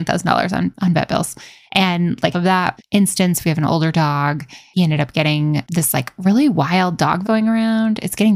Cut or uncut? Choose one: cut